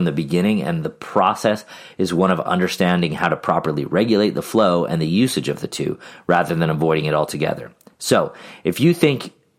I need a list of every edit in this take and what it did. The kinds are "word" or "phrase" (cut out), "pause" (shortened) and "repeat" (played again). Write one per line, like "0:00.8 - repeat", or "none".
none